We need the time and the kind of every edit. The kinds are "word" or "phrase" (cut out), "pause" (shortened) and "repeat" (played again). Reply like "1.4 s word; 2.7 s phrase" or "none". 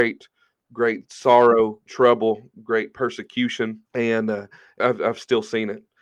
1.9 s word; 3.9 s pause; 4.8 s word